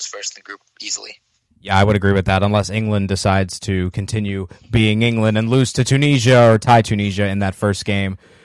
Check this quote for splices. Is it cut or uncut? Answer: uncut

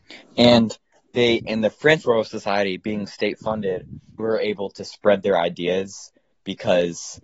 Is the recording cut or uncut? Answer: cut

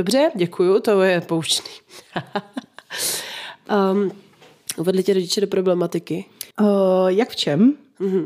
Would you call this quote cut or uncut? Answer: cut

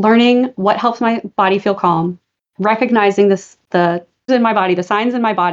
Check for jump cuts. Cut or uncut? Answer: cut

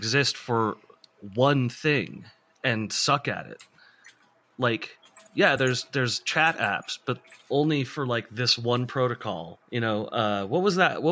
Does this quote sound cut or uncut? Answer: uncut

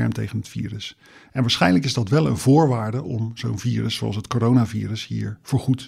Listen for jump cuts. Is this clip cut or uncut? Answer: uncut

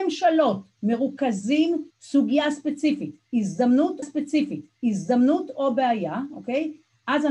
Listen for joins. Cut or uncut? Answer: cut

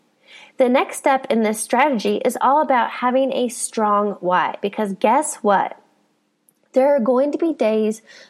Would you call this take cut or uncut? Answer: uncut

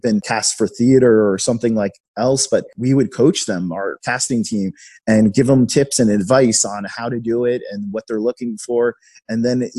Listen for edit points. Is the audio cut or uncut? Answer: uncut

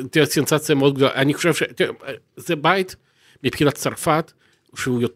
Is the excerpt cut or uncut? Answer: uncut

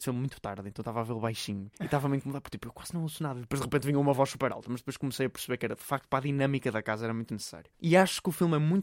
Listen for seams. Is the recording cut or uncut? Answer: cut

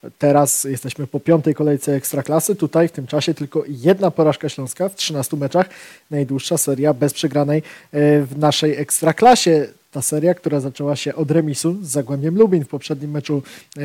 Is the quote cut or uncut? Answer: uncut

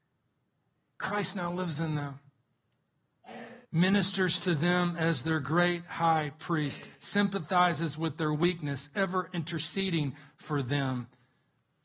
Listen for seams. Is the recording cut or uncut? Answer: cut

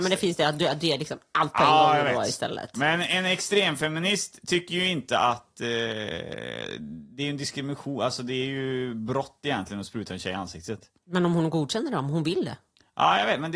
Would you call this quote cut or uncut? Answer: uncut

